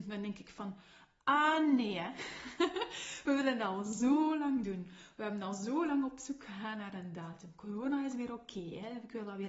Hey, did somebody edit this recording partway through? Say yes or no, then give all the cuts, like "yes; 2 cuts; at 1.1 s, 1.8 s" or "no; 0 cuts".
no; 0 cuts